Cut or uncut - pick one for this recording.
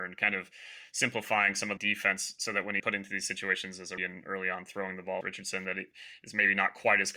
cut